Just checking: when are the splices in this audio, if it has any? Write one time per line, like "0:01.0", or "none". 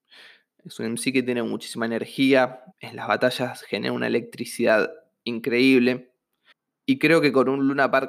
0:02.7
0:06.5